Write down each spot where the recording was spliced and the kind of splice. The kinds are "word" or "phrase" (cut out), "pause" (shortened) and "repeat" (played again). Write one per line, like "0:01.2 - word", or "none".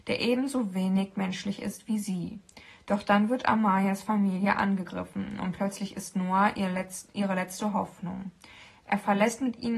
none